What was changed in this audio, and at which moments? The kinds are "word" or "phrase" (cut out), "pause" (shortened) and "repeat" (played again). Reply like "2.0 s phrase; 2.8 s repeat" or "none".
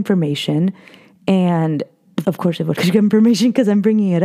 2.2 s word; 2.8 s word